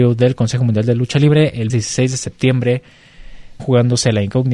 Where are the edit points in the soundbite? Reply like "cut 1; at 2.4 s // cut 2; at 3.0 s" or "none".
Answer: cut 1; at 1.7 s // cut 2; at 3.6 s